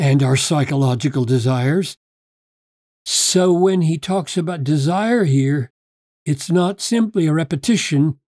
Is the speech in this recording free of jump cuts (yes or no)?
yes